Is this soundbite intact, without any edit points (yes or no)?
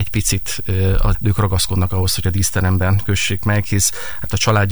no